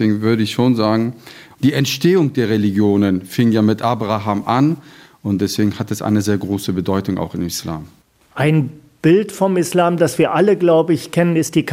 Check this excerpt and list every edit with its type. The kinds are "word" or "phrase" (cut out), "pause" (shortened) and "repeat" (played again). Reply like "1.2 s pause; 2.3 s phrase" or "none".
none